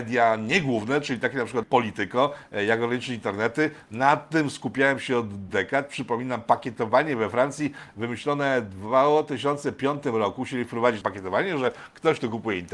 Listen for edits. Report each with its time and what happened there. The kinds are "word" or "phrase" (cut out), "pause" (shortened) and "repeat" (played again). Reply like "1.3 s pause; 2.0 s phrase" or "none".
1.6 s word; 5.5 s phrase; 11.0 s word